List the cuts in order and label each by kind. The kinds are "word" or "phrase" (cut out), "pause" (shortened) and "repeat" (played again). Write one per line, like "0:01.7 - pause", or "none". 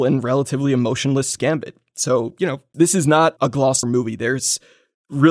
0:01.4 - word
0:02.7 - word
0:03.4 - word
0:03.8 - word